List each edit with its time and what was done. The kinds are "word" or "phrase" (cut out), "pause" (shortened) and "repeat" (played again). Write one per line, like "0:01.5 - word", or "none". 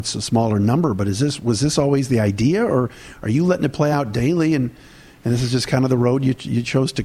none